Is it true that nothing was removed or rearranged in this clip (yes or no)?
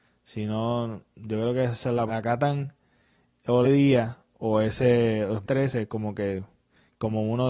no